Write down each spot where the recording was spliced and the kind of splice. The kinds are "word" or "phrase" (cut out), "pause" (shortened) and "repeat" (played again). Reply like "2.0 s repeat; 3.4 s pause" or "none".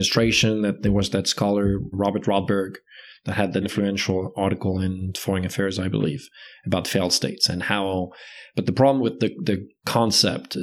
1.9 s word; 3.6 s word